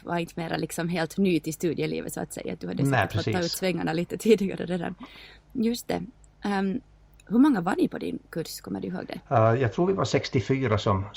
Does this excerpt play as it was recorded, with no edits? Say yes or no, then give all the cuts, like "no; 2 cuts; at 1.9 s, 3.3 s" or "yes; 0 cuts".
yes; 0 cuts